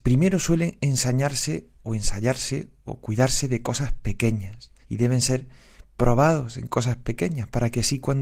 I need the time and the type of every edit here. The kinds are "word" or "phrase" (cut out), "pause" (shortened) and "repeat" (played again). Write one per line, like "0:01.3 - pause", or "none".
0:01.8 - pause
0:04.8 - pause